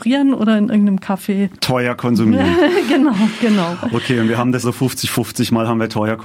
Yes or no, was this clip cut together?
yes